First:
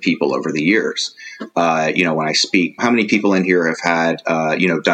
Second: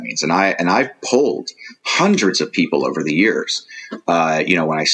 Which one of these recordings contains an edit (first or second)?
first